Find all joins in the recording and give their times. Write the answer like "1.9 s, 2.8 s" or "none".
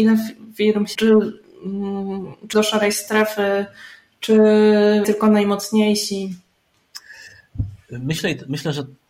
1.0 s, 2.5 s, 5.0 s